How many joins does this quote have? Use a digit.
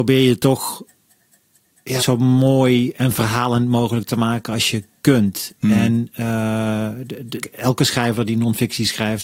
2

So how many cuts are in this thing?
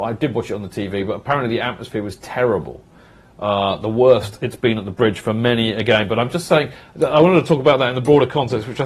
0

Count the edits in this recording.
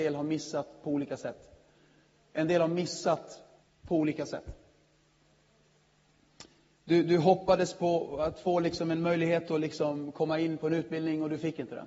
1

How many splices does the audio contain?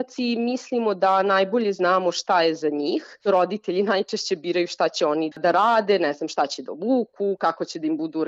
1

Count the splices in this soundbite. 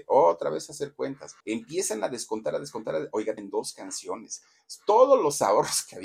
2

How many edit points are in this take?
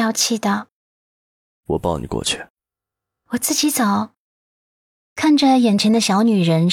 0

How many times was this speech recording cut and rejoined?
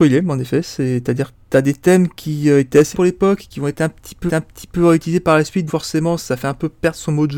4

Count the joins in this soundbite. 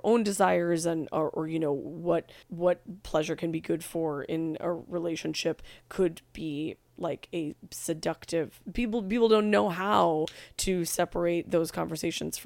1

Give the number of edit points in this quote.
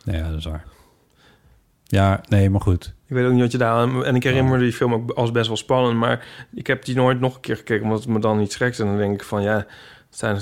1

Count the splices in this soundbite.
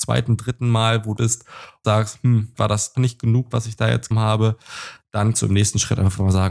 7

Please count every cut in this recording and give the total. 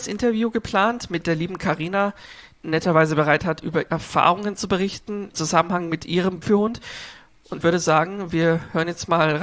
6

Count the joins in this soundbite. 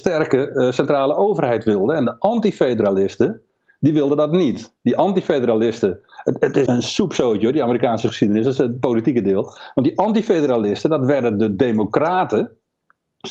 1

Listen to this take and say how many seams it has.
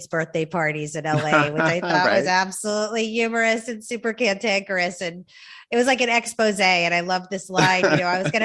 0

